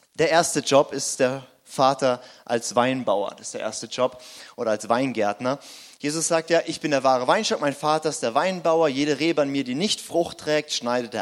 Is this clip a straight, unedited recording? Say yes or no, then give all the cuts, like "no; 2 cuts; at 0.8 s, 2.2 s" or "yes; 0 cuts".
yes; 0 cuts